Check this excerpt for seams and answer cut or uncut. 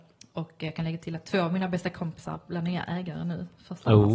uncut